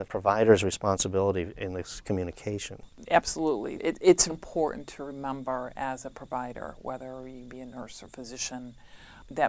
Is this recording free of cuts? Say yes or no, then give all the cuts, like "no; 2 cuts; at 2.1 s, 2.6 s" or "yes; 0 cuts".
no; 2 cuts; at 1.5 s, 4.3 s